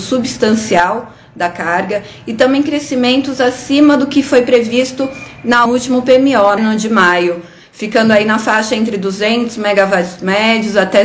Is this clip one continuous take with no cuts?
no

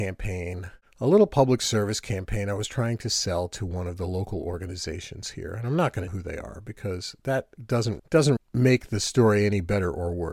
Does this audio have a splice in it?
yes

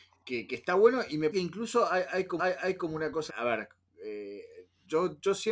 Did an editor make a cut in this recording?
yes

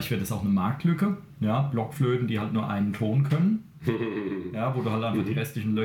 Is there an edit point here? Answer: no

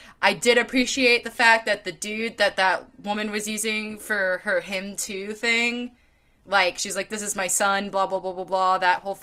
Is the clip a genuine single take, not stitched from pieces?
yes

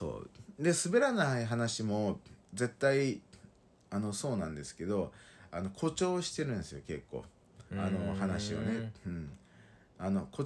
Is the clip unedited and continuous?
no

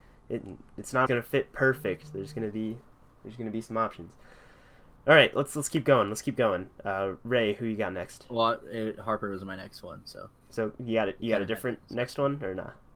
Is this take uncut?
no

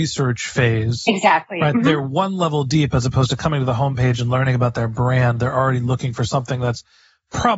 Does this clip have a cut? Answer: no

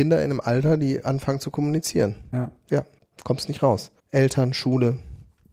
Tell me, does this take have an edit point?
yes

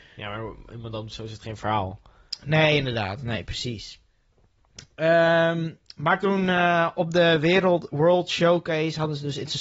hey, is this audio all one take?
yes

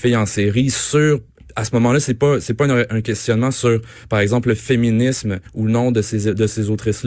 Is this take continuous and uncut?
yes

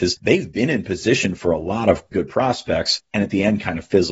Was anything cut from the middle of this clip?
yes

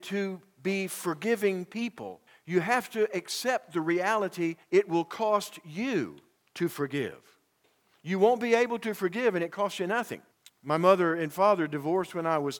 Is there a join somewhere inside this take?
yes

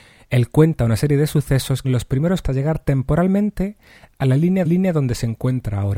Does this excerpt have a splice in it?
yes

